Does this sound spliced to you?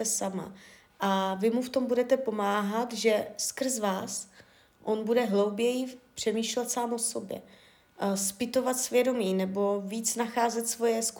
no; 0 cuts

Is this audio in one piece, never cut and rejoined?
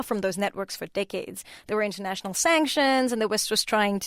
yes; 0 cuts

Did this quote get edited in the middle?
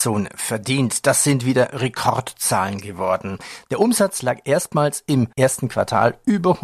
yes; 1 cut; at 5.3 s

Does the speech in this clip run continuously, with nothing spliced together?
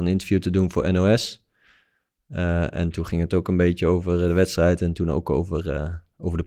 yes; 0 cuts

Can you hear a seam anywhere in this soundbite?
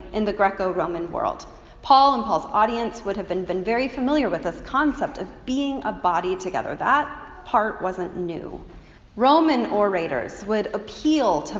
yes; 2 cuts; at 3.5 s, 9.0 s

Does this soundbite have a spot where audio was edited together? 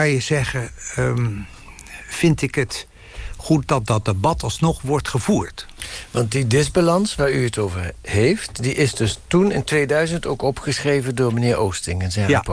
no; 0 cuts

